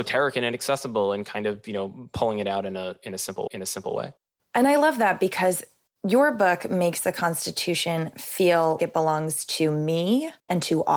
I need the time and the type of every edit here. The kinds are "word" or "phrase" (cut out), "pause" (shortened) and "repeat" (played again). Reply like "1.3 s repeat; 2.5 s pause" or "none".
3.5 s repeat; 8.8 s word